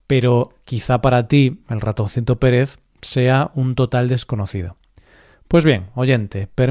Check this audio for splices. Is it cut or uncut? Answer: uncut